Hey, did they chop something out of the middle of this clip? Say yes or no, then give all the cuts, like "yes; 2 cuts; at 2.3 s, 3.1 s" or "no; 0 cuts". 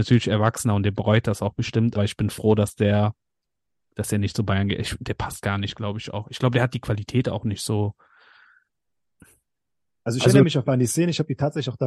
yes; 2 cuts; at 2.0 s, 10.6 s